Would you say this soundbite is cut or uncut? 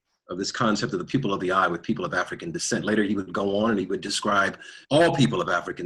cut